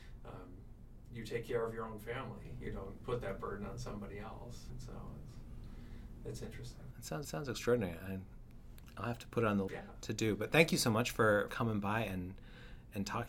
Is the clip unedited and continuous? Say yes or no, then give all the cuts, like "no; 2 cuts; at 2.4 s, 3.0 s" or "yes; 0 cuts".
no; 3 cuts; at 7.2 s, 9.7 s, 11.5 s